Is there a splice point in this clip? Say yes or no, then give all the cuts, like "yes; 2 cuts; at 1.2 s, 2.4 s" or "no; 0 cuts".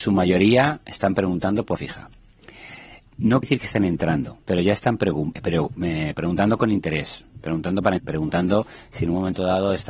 yes; 6 cuts; at 1.8 s, 3.4 s, 4.4 s, 5.3 s, 6.1 s, 8.0 s